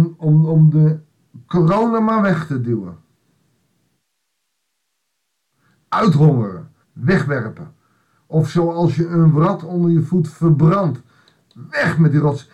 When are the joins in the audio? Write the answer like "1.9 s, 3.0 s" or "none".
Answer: 6.8 s